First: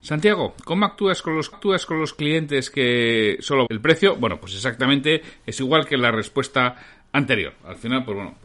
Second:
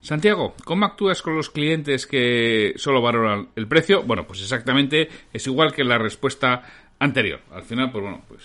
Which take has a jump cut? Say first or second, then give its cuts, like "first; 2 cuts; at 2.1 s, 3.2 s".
first; 2 cuts; at 1.5 s, 3.7 s